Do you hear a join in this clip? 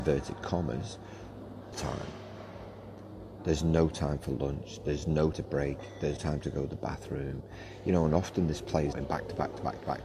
yes; 4 cuts; at 1.7 s, 5.3 s, 6.2 s, 8.9 s

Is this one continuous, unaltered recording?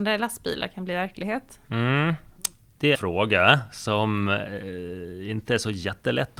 no; 1 cut; at 2.9 s

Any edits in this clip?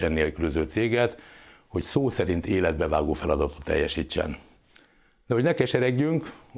no; 0 cuts

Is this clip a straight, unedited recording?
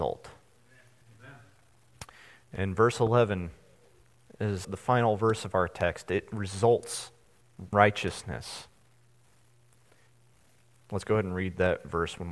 no; 2 cuts; at 4.6 s, 7.7 s

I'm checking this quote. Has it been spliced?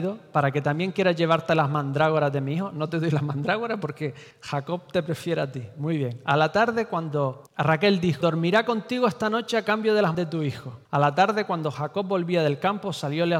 yes; 5 cuts; at 4.3 s, 7.5 s, 8.2 s, 10.1 s, 10.8 s

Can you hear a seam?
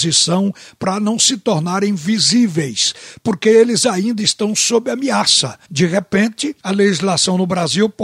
yes; 2 cuts; at 5.6 s, 6.6 s

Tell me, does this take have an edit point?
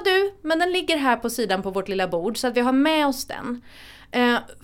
no; 0 cuts

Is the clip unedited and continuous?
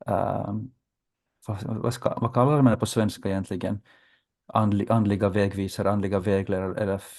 yes; 0 cuts

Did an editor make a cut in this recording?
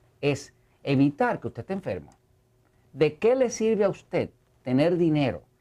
no; 0 cuts

